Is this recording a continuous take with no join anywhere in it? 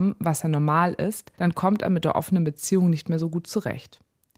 no; 1 cut; at 1.3 s

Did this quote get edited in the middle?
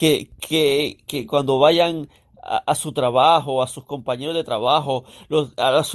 no; 0 cuts

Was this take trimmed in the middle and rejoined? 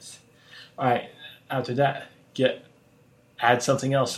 no; 0 cuts

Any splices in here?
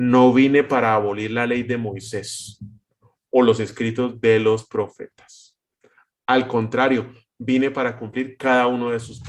no; 0 cuts

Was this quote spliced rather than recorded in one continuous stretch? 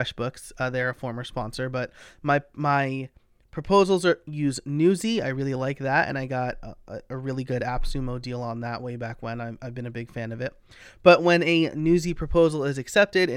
no; 0 cuts

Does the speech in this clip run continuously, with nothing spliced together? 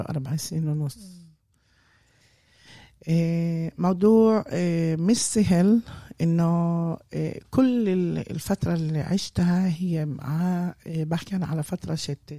yes; 0 cuts

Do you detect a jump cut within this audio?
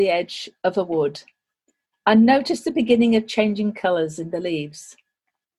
no; 0 cuts

